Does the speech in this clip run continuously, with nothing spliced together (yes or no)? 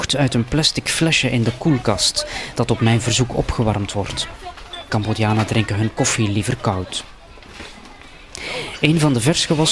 yes